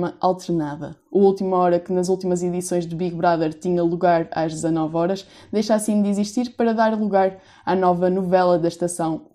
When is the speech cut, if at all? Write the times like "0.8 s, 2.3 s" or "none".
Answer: none